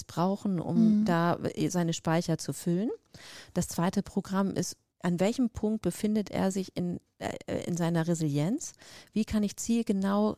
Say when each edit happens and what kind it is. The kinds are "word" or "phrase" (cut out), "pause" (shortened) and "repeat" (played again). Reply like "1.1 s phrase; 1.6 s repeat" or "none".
none

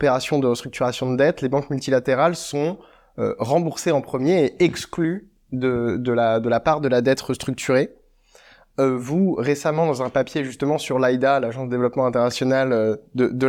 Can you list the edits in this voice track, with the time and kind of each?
none

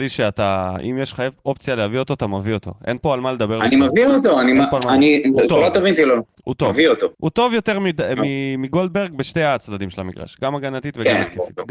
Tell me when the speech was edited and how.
6.3 s pause; 7.1 s pause

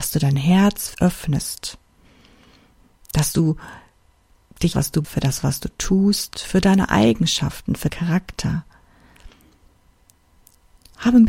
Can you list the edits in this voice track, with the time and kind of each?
0.9 s word; 4.7 s phrase; 5.0 s word; 7.9 s word

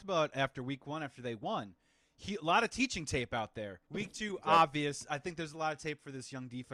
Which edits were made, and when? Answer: 3.8 s pause

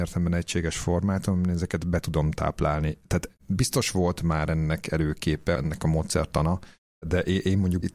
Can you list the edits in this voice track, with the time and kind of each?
3.4 s pause

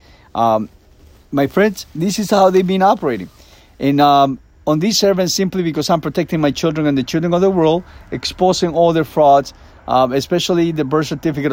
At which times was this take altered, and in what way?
none

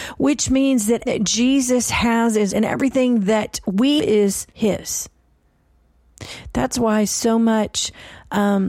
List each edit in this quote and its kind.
1.1 s word; 2.5 s word; 4.0 s word; 4.5 s pause

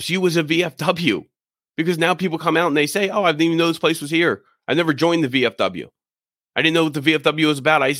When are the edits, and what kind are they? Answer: none

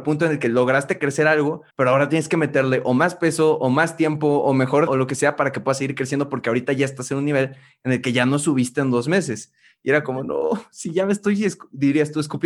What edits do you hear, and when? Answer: 1.7 s pause; 4.9 s word

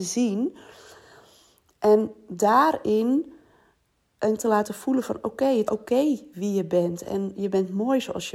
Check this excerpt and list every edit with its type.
4.4 s word; 5.7 s word

